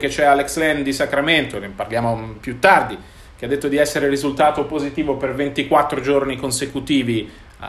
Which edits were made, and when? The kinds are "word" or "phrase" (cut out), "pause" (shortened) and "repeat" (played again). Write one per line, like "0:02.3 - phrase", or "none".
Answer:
none